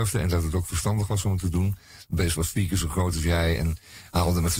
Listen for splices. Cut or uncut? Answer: uncut